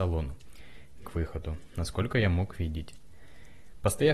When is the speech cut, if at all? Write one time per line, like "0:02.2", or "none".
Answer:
0:01.0